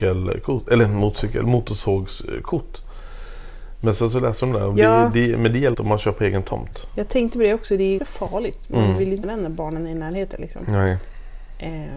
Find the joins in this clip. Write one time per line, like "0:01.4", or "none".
0:05.7
0:08.0
0:09.2